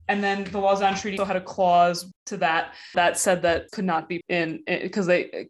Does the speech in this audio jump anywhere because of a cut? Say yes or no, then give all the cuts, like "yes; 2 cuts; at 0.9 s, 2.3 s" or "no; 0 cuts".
yes; 5 cuts; at 1.2 s, 2.1 s, 2.9 s, 3.7 s, 4.2 s